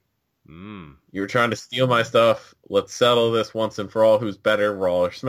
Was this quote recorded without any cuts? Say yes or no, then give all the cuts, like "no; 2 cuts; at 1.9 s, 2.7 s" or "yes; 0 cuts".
yes; 0 cuts